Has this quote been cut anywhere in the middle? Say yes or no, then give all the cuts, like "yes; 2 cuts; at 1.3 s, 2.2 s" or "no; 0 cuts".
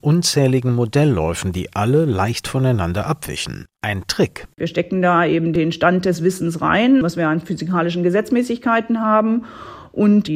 no; 0 cuts